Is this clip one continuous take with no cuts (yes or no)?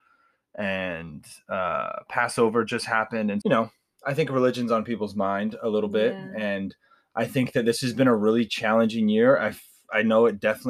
no